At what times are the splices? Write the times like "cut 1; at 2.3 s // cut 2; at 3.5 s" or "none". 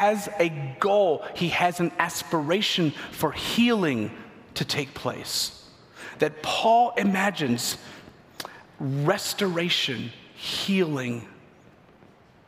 none

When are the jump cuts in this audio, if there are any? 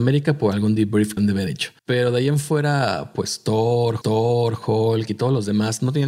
cut 1; at 1.2 s // cut 2; at 1.8 s // cut 3; at 4.0 s

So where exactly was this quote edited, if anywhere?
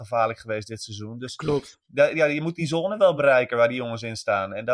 none

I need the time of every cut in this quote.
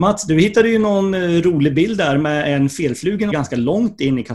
cut 1; at 3.3 s

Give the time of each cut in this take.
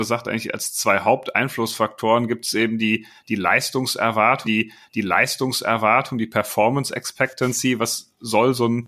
cut 1; at 4.4 s

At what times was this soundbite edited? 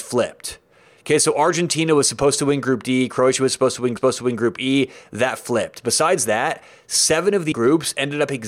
cut 1; at 4.0 s // cut 2; at 7.5 s

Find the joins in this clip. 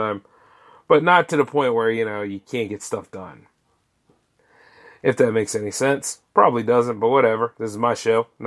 none

